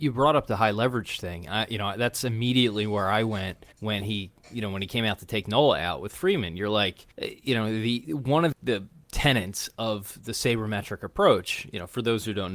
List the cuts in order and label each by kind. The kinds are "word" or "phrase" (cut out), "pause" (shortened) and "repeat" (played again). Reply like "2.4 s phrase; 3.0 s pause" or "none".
3.7 s pause; 7.1 s pause; 8.5 s word